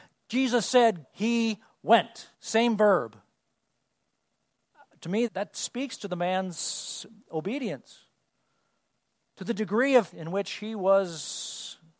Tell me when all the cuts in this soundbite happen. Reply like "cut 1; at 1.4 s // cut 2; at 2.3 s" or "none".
cut 1; at 1.0 s // cut 2; at 2.3 s // cut 3; at 5.3 s // cut 4; at 10.1 s